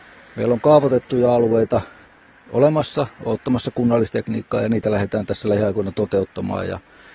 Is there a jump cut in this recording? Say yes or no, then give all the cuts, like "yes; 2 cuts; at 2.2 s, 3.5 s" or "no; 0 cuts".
no; 0 cuts